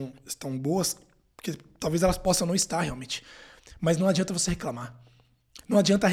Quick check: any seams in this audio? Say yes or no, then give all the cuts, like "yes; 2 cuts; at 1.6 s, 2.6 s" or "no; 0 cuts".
no; 0 cuts